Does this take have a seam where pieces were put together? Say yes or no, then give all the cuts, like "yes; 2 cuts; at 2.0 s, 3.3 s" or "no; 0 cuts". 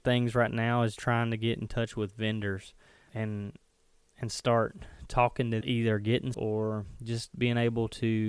yes; 4 cuts; at 1.0 s, 3.1 s, 5.6 s, 6.3 s